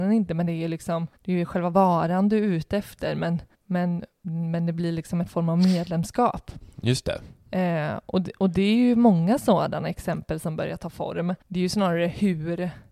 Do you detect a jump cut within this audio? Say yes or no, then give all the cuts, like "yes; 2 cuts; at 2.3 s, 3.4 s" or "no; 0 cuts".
yes; 3 cuts; at 1.2 s, 3.5 s, 11.4 s